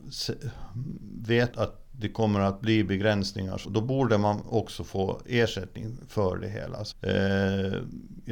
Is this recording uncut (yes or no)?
no